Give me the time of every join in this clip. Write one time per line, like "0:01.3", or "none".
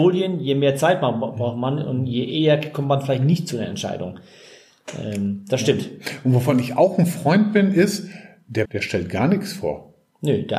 0:08.7

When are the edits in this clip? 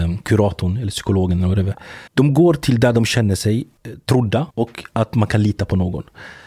0:02.1
0:03.8
0:04.5

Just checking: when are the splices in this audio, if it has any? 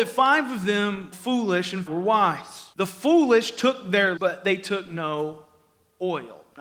0:01.1
0:01.9
0:02.7
0:04.2

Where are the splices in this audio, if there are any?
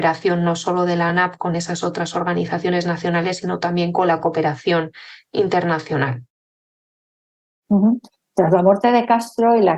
none

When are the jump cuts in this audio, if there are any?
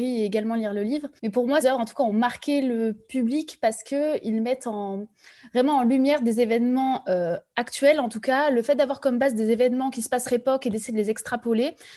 0:01.2
0:01.6
0:10.2

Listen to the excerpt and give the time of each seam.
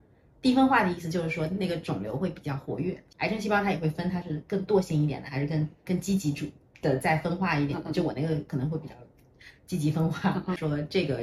0:05.8

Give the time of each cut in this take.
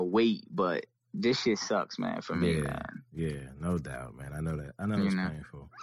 none

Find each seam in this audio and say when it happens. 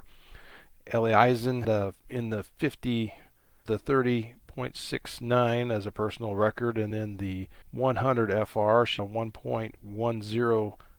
0:01.6
0:02.0
0:03.7
0:06.9
0:07.6
0:09.0

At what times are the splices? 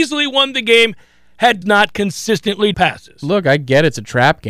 0:01.6
0:02.7

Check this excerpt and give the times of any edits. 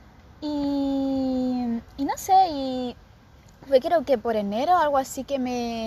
none

